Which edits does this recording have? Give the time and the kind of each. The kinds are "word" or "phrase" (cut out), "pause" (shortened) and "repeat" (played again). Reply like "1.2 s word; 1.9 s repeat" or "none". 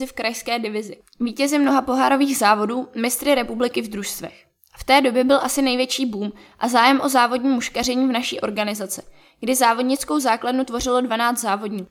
none